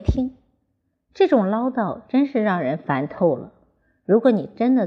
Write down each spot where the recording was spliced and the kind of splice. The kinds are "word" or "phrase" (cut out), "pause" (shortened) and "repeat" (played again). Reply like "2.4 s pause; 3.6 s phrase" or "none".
none